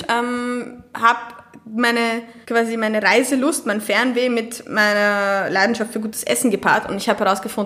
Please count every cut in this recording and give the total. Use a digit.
1